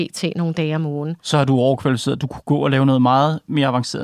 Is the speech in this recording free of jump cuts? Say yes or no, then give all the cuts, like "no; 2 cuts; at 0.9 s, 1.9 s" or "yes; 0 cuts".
yes; 0 cuts